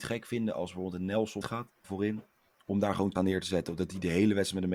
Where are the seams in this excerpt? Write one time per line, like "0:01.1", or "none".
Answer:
0:01.4
0:01.8
0:03.1